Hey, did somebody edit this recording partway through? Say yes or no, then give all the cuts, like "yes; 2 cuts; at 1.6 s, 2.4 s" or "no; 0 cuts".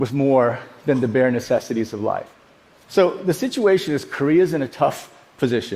no; 0 cuts